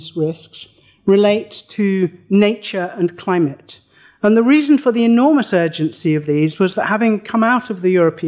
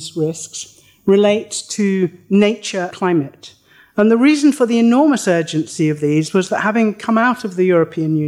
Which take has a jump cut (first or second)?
second